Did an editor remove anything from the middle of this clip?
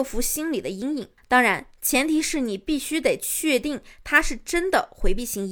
yes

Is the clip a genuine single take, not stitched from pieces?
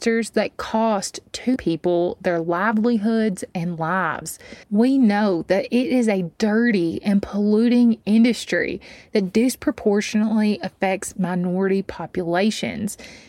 no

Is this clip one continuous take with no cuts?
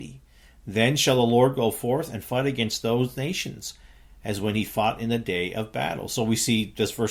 yes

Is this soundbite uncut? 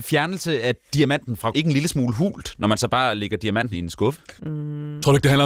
no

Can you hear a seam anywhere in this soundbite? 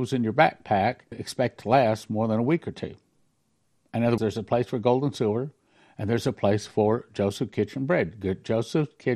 yes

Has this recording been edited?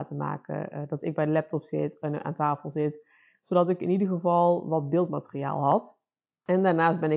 no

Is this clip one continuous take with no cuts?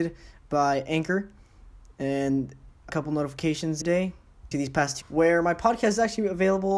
no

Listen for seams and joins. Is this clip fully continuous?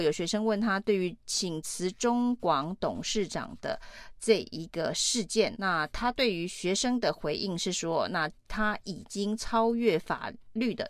no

